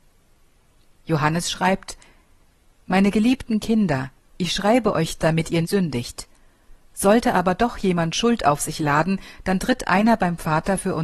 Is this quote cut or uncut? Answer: cut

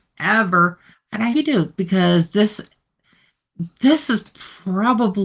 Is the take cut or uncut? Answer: cut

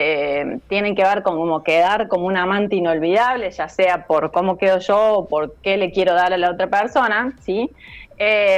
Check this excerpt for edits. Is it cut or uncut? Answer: uncut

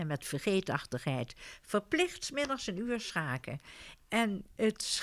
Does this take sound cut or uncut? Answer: uncut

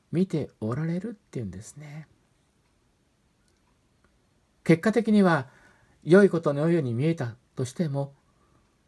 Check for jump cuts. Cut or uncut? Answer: uncut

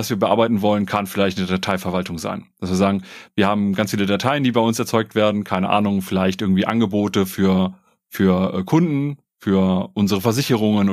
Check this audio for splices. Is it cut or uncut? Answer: uncut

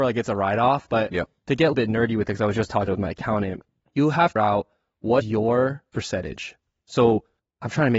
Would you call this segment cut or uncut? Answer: cut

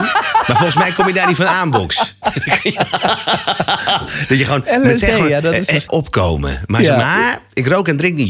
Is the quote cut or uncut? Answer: cut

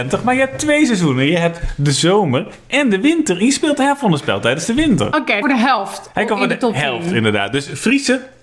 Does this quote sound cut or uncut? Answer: cut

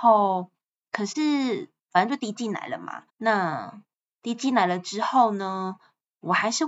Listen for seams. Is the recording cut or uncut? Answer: cut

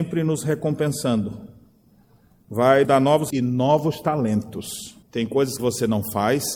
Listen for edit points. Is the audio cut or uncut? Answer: cut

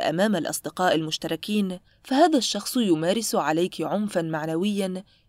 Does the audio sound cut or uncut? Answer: uncut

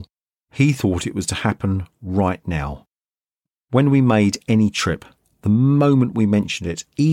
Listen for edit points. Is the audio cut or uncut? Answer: uncut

